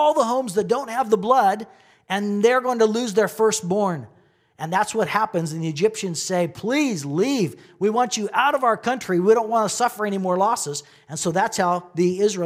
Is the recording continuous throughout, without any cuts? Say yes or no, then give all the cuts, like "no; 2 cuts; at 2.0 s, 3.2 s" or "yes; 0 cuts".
yes; 0 cuts